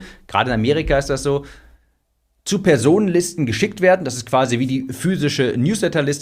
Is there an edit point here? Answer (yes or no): no